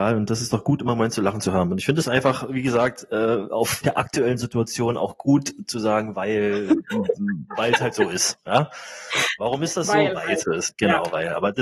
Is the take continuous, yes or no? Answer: no